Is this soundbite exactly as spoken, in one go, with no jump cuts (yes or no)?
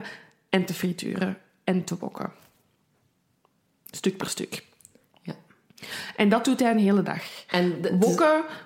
yes